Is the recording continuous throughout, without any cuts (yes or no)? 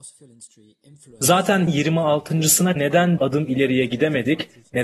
no